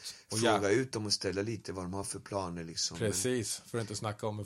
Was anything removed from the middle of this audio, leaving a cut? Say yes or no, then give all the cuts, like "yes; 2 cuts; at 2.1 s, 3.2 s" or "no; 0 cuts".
no; 0 cuts